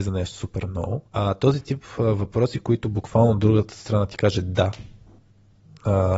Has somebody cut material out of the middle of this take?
yes; 1 cut; at 1.1 s

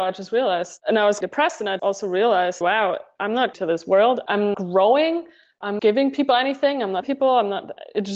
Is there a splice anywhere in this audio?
yes; 7 cuts; at 1.2 s, 1.8 s, 2.6 s, 3.5 s, 4.5 s, 5.8 s, 7.0 s

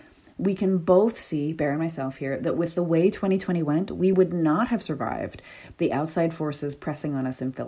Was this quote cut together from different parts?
no; 0 cuts

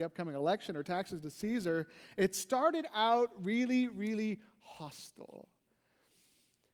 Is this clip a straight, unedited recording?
yes; 0 cuts

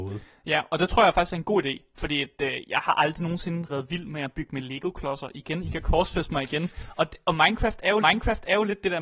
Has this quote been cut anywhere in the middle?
yes; 2 cuts; at 3.7 s, 8.0 s

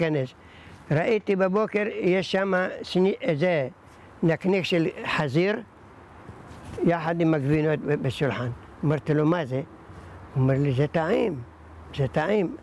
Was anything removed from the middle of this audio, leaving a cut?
no; 0 cuts

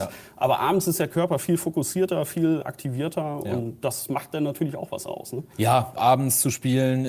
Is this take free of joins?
no; 2 cuts; at 2.6 s, 6.0 s

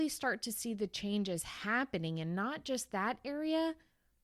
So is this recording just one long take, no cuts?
yes; 0 cuts

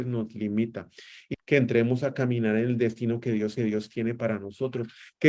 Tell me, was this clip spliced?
yes; 2 cuts; at 1.3 s, 3.6 s

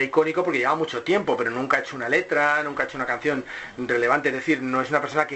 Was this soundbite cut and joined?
no; 0 cuts

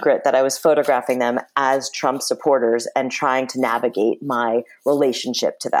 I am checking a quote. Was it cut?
no; 0 cuts

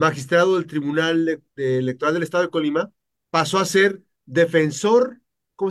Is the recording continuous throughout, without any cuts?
yes; 0 cuts

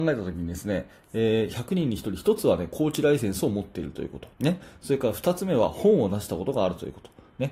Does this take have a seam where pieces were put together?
yes; 1 cut; at 4.3 s

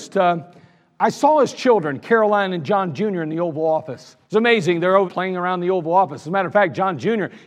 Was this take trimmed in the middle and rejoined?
yes; 2 cuts; at 4.2 s, 5.0 s

